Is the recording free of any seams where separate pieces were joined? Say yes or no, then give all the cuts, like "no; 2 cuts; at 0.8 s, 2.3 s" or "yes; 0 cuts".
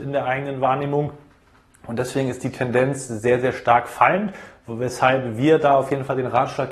yes; 0 cuts